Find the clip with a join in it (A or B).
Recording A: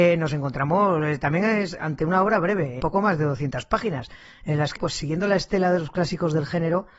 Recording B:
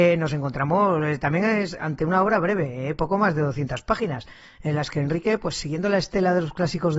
A